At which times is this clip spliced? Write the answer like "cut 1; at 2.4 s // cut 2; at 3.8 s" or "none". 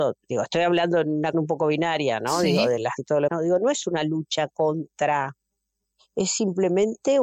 cut 1; at 1.3 s // cut 2; at 3.0 s // cut 3; at 3.3 s